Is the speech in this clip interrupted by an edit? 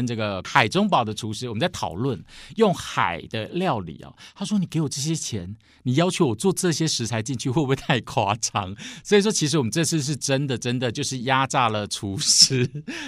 no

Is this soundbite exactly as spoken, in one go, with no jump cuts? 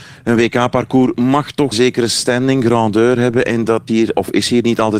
no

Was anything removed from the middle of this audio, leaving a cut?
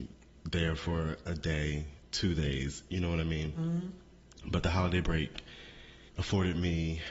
yes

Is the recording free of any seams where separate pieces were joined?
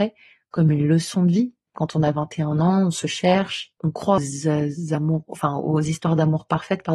no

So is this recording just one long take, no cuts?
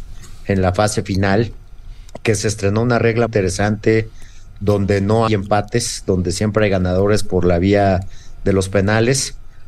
no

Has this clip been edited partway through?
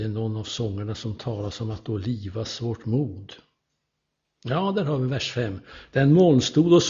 no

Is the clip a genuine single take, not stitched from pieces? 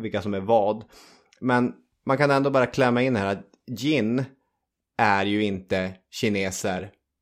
yes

